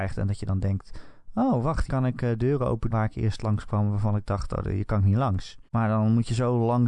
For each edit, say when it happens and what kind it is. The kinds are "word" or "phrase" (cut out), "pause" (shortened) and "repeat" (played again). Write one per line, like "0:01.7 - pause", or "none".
0:01.9 - word
0:02.9 - word
0:05.7 - pause